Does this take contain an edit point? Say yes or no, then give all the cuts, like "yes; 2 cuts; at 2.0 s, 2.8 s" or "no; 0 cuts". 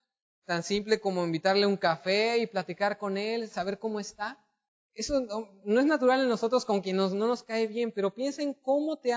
yes; 1 cut; at 4.7 s